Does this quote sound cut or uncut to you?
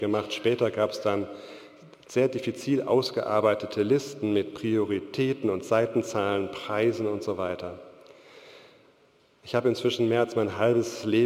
uncut